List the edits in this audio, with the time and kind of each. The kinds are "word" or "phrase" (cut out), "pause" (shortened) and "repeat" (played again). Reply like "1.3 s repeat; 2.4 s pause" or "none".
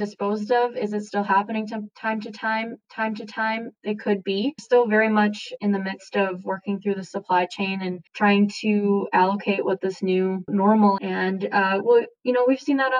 2.8 s repeat; 4.6 s phrase; 8.1 s pause; 10.5 s phrase; 11.0 s word